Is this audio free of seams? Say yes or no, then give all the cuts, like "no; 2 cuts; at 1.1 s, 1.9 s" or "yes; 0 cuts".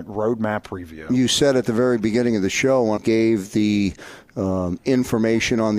no; 1 cut; at 3.0 s